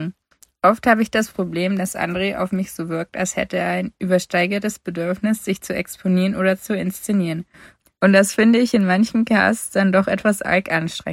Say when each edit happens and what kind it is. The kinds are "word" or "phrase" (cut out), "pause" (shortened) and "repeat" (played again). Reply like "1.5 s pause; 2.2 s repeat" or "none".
none

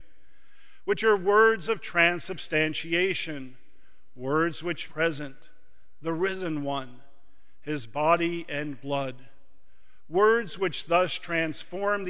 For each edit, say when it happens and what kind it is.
4.9 s phrase

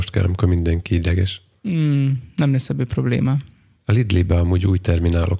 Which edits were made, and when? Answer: none

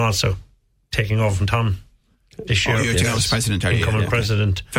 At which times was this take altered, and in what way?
none

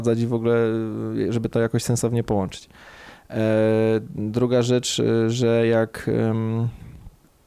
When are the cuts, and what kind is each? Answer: none

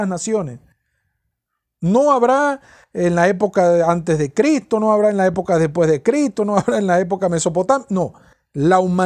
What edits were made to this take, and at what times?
none

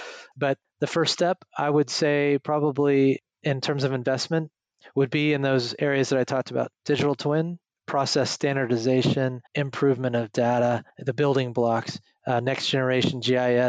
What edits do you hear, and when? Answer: 7.6 s pause; 9.5 s pause; 10.9 s pause

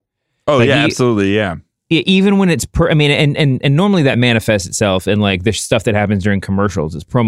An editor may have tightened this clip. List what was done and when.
none

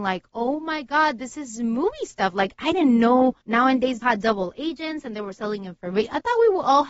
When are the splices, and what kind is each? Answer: 3.4 s pause; 4.0 s word

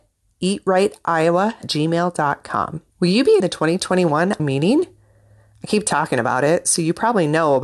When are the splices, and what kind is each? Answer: 1.6 s word; 2.9 s pause; 3.4 s word; 4.4 s phrase

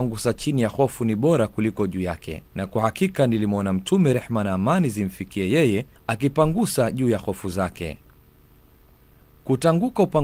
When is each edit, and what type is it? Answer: 2.5 s pause; 6.0 s pause

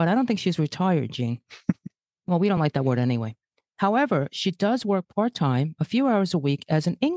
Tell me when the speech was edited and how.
none

